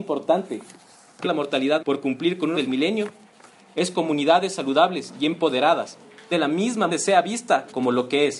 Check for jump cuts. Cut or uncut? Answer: cut